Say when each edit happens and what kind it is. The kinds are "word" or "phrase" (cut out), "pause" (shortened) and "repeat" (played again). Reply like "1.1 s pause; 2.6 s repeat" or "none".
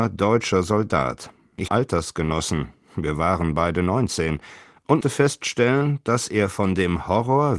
1.7 s phrase; 5.0 s word